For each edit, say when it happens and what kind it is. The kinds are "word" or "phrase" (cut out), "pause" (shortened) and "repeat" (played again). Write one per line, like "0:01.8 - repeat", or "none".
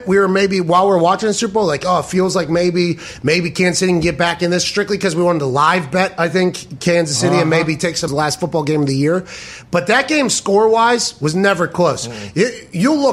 0:08.1 - phrase